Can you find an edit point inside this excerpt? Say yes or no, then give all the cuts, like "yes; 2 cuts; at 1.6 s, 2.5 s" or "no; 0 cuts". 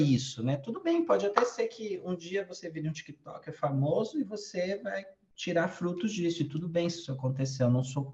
no; 0 cuts